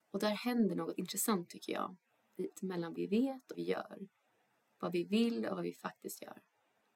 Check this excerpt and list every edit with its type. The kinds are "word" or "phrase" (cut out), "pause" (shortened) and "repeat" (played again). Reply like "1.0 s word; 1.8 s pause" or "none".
1.0 s word; 2.5 s word; 2.9 s word; 3.5 s word